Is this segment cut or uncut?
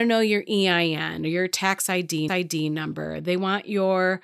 cut